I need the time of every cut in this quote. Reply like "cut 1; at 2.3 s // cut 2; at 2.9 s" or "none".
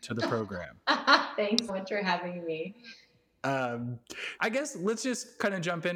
cut 1; at 1.7 s // cut 2; at 4.4 s